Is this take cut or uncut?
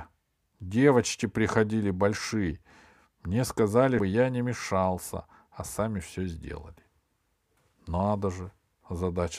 cut